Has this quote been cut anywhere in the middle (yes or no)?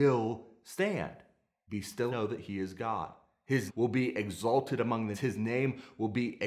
yes